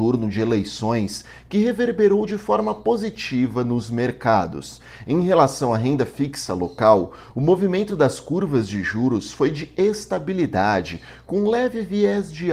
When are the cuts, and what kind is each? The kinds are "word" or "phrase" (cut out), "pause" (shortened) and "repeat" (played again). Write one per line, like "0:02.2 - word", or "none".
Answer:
none